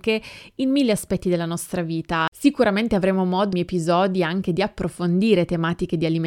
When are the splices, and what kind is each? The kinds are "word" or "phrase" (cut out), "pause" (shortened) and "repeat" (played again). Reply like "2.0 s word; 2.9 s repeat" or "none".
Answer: 3.5 s phrase